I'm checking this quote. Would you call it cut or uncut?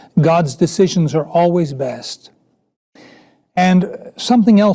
uncut